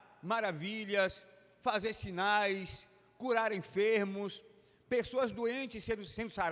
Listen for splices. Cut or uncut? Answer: uncut